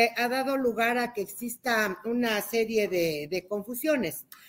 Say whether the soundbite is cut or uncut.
uncut